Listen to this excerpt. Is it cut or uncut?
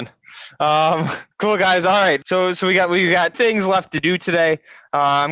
cut